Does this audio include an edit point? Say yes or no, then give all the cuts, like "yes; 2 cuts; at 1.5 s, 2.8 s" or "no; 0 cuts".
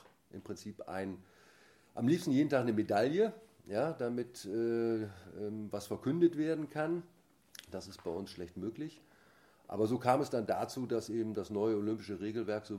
no; 0 cuts